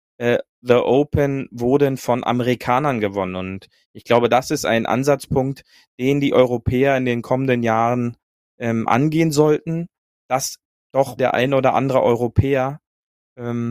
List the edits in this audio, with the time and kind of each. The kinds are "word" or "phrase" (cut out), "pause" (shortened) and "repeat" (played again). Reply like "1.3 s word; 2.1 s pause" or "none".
11.2 s phrase